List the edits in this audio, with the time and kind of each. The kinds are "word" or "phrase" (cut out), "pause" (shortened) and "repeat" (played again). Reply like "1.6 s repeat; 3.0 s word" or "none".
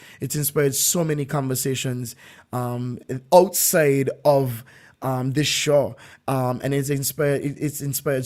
none